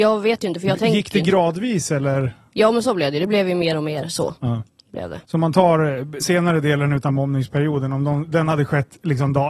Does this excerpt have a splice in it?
yes; 3 cuts; at 4.4 s, 5.2 s, 6.2 s

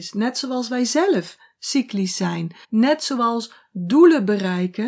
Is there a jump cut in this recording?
yes; 1 cut; at 2.6 s

